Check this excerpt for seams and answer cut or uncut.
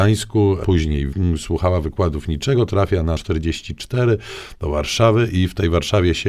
cut